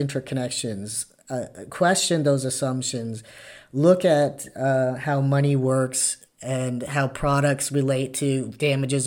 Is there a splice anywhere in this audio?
no; 0 cuts

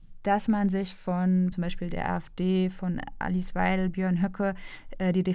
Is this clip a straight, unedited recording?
no; 1 cut; at 1.5 s

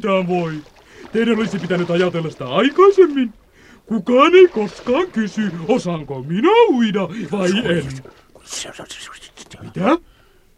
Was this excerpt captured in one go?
yes; 0 cuts

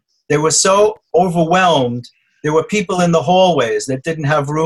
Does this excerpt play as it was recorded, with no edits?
yes; 0 cuts

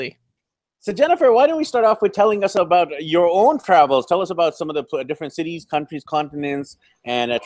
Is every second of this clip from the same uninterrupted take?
yes; 0 cuts

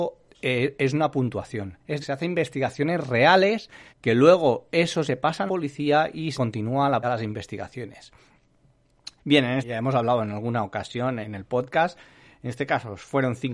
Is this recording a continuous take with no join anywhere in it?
no; 9 cuts; at 2.0 s, 3.9 s, 5.1 s, 5.5 s, 6.3 s, 7.0 s, 9.2 s, 9.6 s, 11.2 s

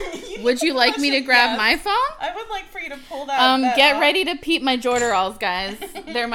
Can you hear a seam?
no; 0 cuts

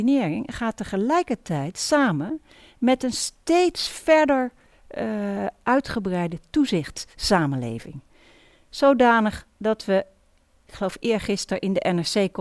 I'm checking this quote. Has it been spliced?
no; 0 cuts

